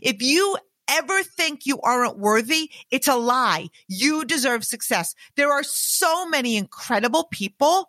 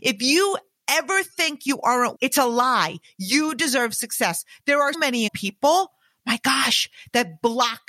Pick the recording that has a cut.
second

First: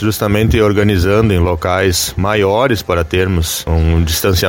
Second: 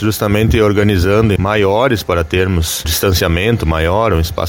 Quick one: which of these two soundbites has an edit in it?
second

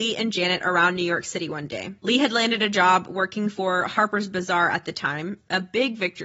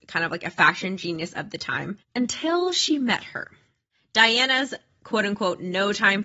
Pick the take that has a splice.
first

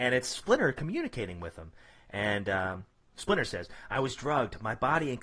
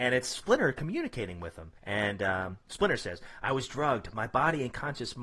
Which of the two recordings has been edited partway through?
second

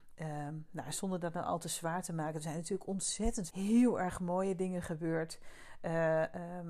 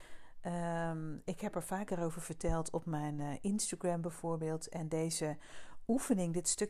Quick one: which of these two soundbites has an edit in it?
first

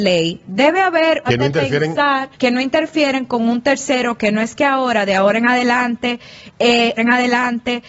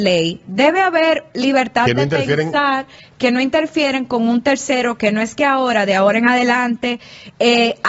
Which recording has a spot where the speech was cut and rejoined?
first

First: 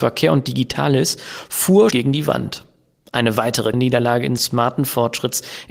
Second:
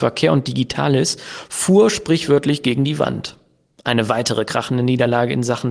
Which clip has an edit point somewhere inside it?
first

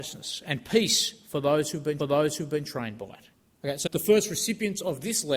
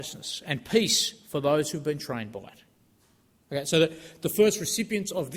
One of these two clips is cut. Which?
first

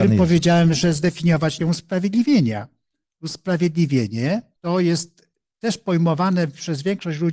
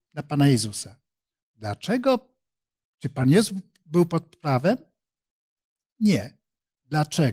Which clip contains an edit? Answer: first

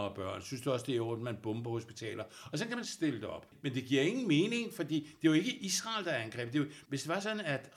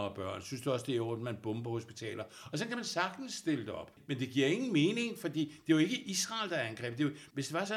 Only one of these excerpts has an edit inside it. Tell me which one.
first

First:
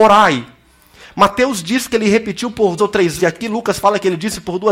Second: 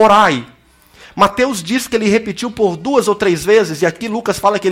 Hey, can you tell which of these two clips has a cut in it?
first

